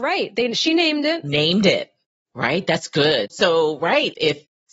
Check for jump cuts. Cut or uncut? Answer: uncut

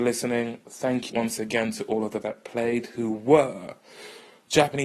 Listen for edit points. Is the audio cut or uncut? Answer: cut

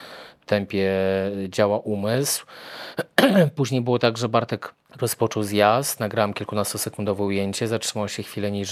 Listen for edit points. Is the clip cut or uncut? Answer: cut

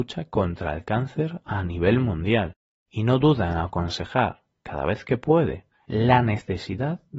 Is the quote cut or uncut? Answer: uncut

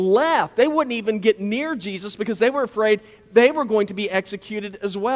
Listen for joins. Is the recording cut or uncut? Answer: uncut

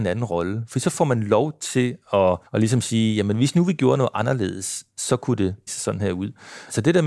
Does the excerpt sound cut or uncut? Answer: cut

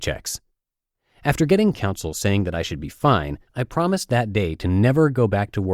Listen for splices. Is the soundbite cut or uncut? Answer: cut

